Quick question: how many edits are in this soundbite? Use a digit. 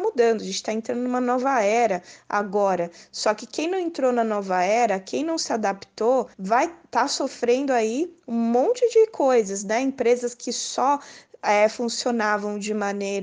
1